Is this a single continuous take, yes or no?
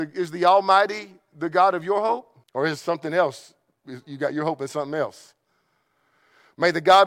no